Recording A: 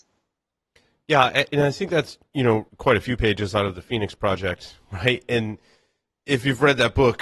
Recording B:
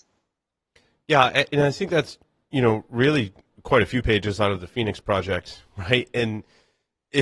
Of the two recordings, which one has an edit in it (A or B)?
A